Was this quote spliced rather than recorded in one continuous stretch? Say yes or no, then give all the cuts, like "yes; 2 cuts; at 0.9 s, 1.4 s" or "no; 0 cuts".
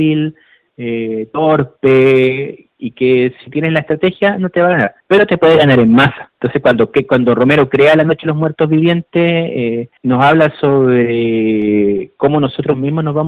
yes; 3 cuts; at 5.0 s, 6.3 s, 10.0 s